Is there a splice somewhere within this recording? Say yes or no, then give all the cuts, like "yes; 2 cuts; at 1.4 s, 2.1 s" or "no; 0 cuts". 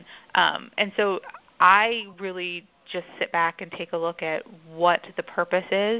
no; 0 cuts